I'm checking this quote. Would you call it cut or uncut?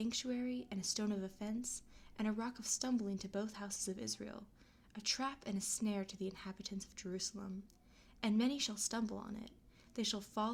uncut